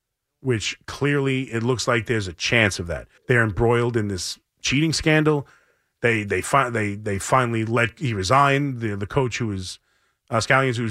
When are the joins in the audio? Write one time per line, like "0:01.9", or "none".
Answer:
0:03.2